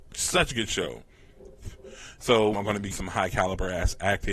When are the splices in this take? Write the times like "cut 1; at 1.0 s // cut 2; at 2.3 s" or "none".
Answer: cut 1; at 2.5 s // cut 2; at 2.9 s